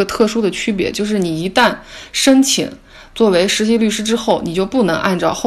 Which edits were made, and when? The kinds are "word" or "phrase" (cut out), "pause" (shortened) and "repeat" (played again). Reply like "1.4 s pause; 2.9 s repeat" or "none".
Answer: none